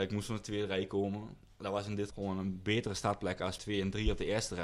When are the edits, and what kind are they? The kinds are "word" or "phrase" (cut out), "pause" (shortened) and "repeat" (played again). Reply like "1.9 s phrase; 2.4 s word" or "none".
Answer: 2.1 s word; 3.6 s word

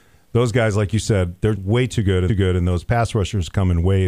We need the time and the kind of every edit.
1.5 s word; 2.3 s repeat

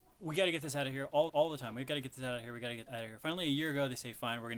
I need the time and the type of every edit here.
1.3 s repeat; 2.9 s word

